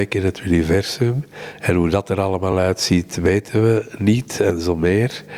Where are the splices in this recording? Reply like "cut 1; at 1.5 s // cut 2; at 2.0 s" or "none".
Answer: none

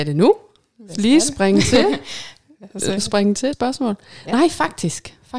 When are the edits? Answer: cut 1; at 3.5 s

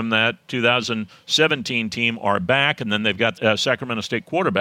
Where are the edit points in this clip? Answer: cut 1; at 3.4 s

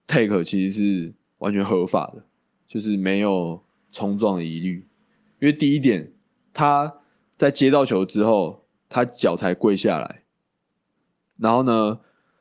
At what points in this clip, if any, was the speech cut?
none

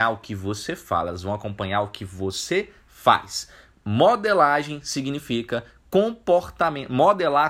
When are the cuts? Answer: none

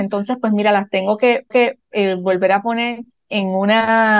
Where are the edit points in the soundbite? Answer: cut 1; at 1.5 s // cut 2; at 3.3 s

